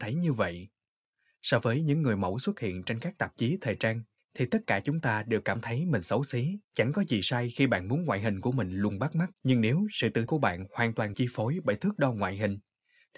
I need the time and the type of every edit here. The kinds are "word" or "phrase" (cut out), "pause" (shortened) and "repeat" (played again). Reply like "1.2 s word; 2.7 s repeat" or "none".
4.2 s pause; 6.6 s pause; 9.3 s pause; 10.3 s word; 11.1 s word